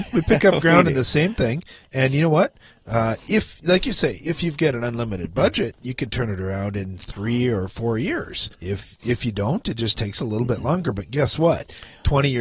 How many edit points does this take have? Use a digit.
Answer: 1